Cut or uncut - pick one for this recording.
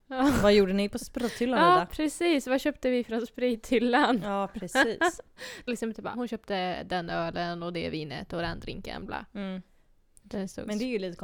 cut